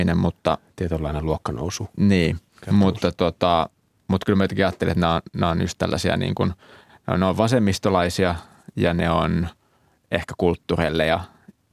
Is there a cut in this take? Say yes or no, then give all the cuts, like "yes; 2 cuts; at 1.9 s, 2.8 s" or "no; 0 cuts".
yes; 1 cut; at 2.5 s